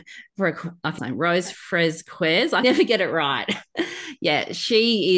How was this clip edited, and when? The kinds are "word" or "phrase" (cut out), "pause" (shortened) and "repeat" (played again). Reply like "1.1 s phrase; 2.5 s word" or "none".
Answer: 1.0 s phrase; 2.6 s word